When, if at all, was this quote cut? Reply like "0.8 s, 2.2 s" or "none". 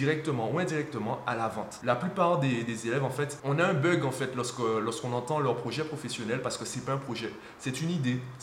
none